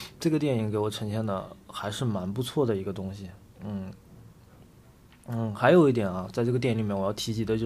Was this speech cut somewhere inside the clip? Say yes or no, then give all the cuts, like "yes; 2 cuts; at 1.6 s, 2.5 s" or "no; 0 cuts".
no; 0 cuts